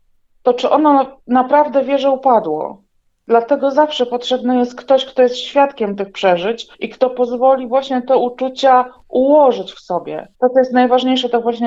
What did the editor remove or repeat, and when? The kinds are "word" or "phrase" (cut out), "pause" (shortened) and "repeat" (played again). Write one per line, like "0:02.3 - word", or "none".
0:06.7 - pause
0:10.3 - pause